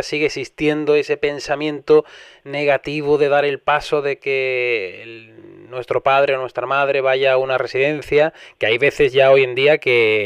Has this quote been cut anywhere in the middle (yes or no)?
no